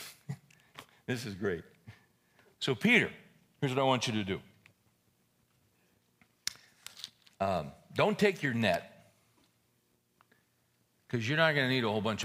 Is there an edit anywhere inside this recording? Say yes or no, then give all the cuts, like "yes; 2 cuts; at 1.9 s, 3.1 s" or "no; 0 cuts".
no; 0 cuts